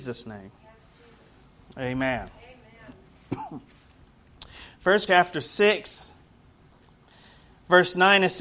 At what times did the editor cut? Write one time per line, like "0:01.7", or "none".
0:05.1